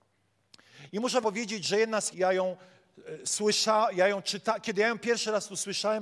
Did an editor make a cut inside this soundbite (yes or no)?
yes